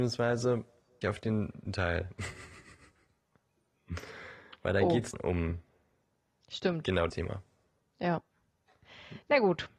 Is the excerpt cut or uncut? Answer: cut